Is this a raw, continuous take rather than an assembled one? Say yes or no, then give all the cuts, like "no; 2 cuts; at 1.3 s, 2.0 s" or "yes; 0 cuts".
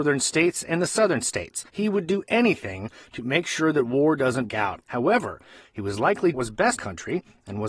no; 5 cuts; at 1.7 s, 4.5 s, 4.8 s, 6.3 s, 6.8 s